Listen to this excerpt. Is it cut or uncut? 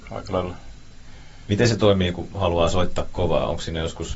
uncut